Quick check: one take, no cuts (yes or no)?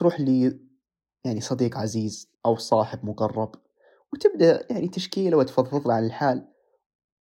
no